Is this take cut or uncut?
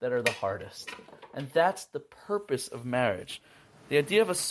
uncut